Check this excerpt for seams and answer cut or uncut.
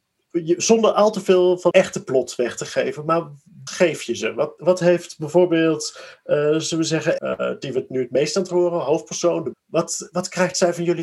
cut